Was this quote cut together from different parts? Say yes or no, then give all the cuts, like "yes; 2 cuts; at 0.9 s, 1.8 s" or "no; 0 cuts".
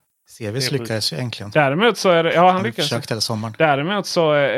no; 0 cuts